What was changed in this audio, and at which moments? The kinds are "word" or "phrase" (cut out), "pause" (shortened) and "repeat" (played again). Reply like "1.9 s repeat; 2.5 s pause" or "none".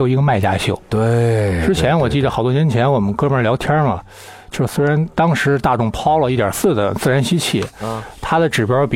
none